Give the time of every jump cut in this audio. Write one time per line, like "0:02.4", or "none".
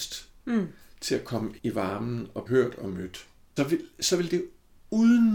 0:01.6
0:02.5
0:03.6